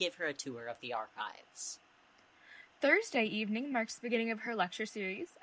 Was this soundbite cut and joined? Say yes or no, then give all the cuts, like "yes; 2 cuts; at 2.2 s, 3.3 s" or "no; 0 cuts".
no; 0 cuts